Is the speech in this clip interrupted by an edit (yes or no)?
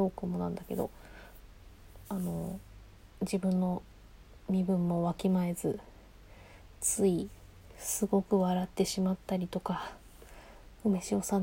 yes